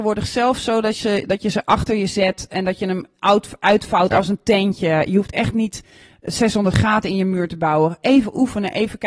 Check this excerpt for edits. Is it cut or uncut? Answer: uncut